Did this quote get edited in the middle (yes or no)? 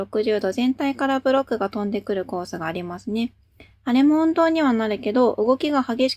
no